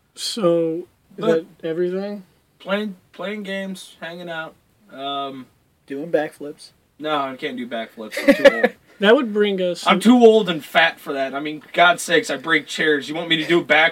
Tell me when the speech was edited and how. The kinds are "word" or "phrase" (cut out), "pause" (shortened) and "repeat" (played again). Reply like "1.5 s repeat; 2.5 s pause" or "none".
1.0 s word

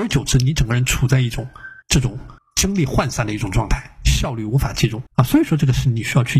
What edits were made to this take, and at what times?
1.8 s pause; 2.4 s pause; 5.1 s pause

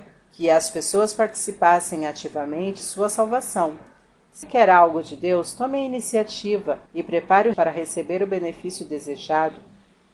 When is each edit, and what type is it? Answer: 2.8 s word; 4.4 s word; 6.9 s pause; 7.5 s word

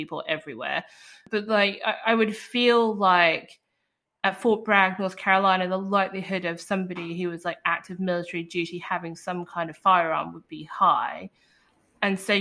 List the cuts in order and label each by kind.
none

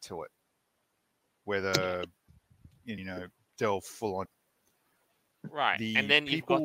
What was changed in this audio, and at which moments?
3.0 s phrase; 3.4 s pause; 4.2 s word

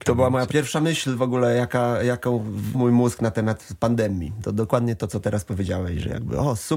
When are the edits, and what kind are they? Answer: 2.7 s word

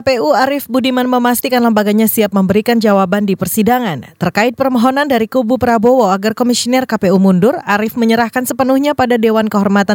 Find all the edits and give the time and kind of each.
none

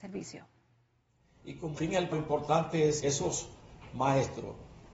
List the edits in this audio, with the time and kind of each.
1.8 s word; 2.1 s word; 3.0 s word

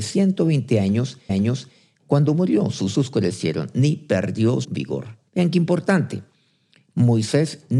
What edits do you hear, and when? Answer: 1.3 s repeat; 2.9 s phrase; 4.6 s word; 5.3 s pause

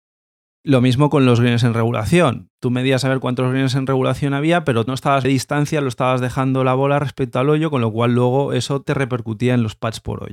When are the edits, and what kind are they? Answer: 2.5 s pause; 5.2 s phrase

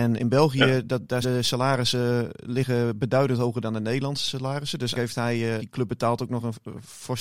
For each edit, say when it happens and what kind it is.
1.2 s word; 4.9 s word; 5.6 s phrase

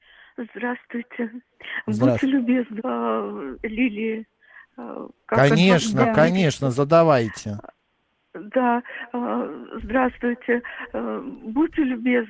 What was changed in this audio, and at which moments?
2.8 s phrase

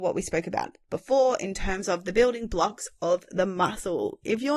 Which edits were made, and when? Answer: none

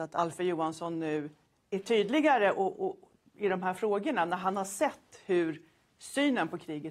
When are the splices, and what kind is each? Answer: none

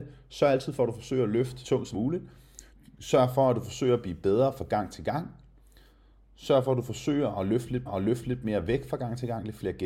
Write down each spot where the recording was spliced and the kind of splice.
1.6 s word; 1.9 s word; 2.7 s pause; 7.9 s repeat

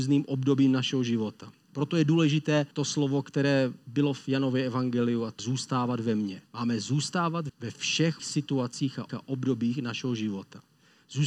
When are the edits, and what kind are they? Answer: 2.7 s pause; 5.4 s word; 6.5 s pause; 7.5 s word; 8.2 s word; 9.1 s repeat

